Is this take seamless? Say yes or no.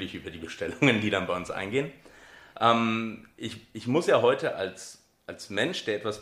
yes